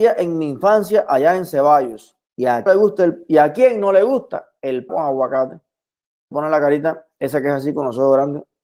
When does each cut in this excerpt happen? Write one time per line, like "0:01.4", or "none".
0:02.2
0:02.7
0:04.9
0:06.3